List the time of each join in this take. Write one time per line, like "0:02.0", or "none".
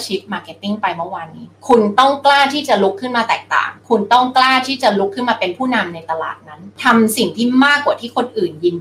0:03.8

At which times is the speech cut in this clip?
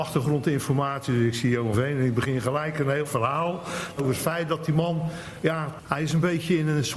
0:01.7
0:03.0
0:04.0

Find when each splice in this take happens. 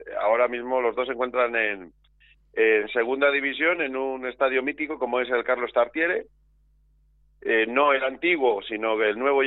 none

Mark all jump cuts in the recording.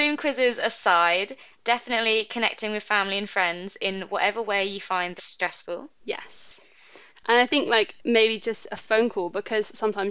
0:05.2
0:06.0
0:08.0

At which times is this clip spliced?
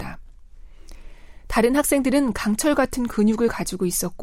none

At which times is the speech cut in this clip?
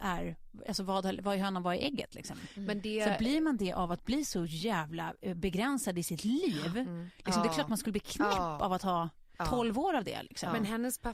none

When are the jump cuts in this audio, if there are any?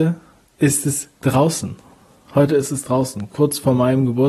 none

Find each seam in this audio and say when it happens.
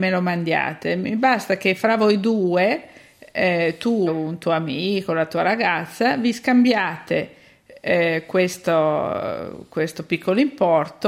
0:04.1

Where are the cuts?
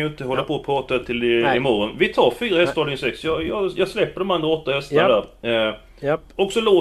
none

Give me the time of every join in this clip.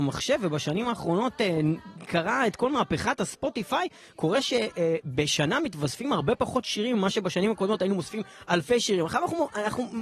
none

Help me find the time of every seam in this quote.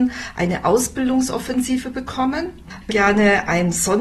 0:02.9

